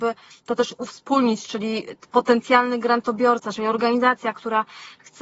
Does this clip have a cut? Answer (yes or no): no